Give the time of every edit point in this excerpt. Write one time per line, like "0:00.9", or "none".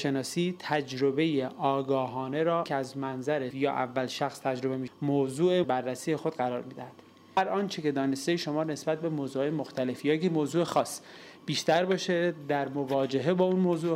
0:02.7
0:03.5
0:04.9
0:05.6